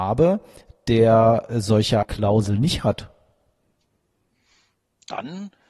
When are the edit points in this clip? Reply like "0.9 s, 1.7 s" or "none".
2.0 s

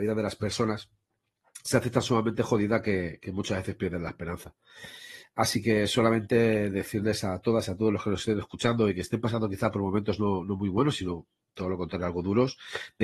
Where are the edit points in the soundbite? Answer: none

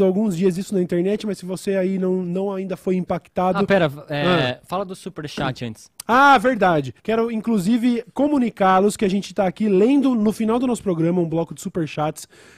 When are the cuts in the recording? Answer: 7.0 s

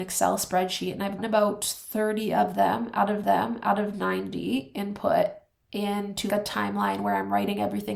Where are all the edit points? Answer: 1.2 s, 3.2 s, 6.3 s

